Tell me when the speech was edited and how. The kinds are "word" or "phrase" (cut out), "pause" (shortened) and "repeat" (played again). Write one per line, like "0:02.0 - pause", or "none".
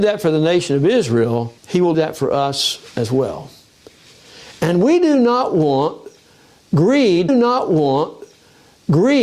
0:01.6 - pause
0:01.9 - word
0:07.3 - repeat